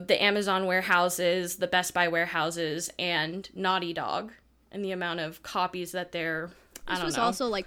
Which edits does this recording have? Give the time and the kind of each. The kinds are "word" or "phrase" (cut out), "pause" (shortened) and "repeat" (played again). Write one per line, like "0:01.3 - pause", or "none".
none